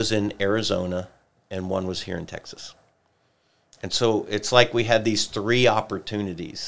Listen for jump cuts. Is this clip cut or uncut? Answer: uncut